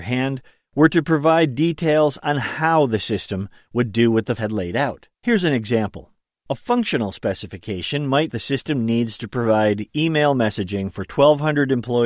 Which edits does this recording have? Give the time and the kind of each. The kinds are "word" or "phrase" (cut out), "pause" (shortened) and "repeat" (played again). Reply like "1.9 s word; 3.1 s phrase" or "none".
4.4 s phrase; 5.1 s pause; 6.4 s pause; 8.3 s phrase

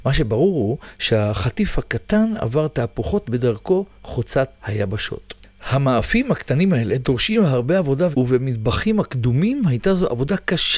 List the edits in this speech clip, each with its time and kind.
3.2 s word; 8.1 s word

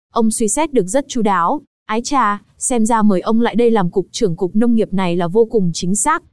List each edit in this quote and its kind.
none

